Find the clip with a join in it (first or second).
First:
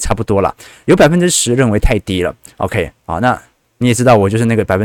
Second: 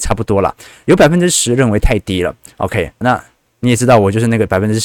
second